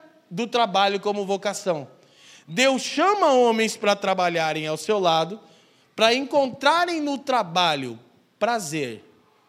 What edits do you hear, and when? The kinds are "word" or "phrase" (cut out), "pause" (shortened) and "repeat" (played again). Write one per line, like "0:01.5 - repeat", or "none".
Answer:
none

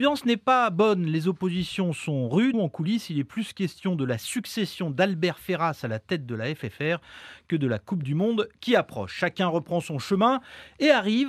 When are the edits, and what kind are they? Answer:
0:02.5 - phrase

